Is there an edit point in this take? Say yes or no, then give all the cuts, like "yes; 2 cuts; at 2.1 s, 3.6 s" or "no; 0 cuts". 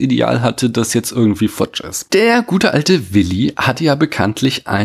no; 0 cuts